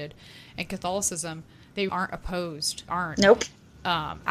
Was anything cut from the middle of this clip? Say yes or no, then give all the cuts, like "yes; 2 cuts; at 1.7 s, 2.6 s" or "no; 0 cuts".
yes; 2 cuts; at 1.9 s, 2.9 s